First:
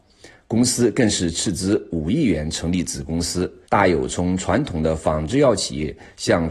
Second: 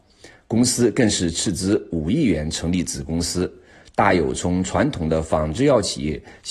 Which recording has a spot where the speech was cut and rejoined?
first; 1 cut; at 3.6 s

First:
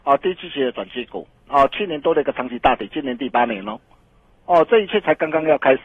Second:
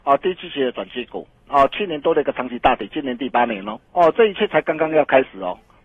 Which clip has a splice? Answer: second; 1 cut; at 3.9 s

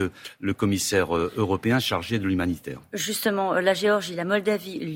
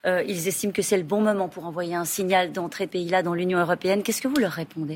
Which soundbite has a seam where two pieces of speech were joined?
second; 1 cut; at 2.9 s

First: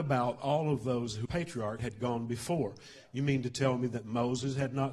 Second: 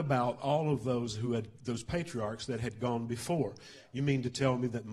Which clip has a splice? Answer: first; 2 cuts; at 1.2 s, 1.8 s

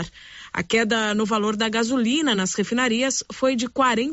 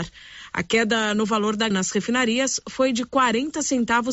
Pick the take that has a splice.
second; 1 cut; at 1.7 s

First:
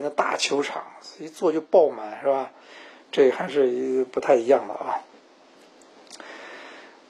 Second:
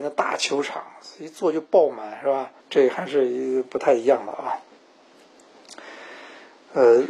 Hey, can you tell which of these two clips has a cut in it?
second; 1 cut; at 2.6 s

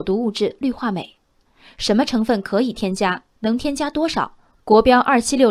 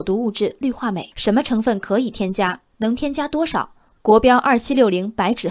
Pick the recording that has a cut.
second; 1 cut; at 1.1 s

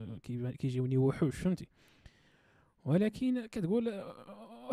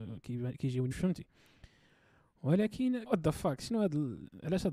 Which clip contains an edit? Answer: second; 2 cuts; at 0.9 s, 3.1 s

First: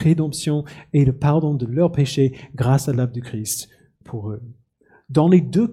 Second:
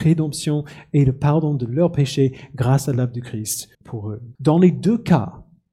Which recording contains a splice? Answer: second; 2 cuts; at 3.7 s, 4.3 s

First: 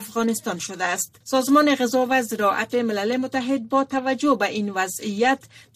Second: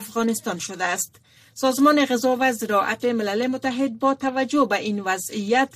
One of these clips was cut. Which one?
first; 1 cut; at 1.2 s

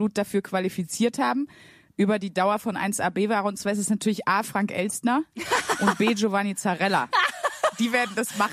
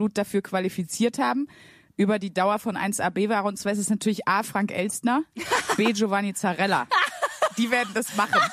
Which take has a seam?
second; 1 cut; at 5.8 s

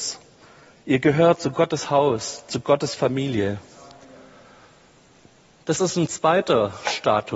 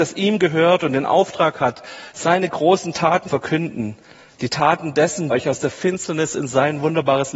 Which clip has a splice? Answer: second; 2 cuts; at 3.3 s, 5.3 s

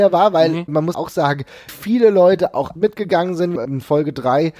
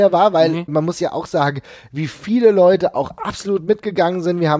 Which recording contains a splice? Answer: first; 4 cuts; at 0.9 s, 1.7 s, 2.8 s, 3.6 s

